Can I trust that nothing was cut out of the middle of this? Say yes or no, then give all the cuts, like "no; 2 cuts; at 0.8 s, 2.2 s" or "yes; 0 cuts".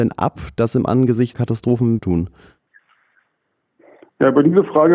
no; 2 cuts; at 1.3 s, 2.0 s